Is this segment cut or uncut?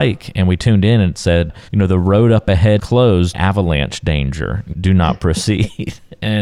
cut